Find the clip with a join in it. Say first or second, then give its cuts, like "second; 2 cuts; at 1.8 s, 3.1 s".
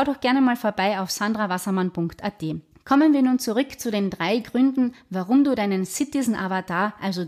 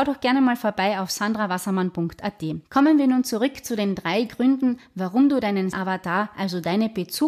second; 2 cuts; at 2.6 s, 5.7 s